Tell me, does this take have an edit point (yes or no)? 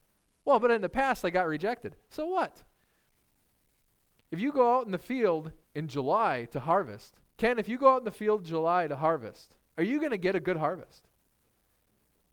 yes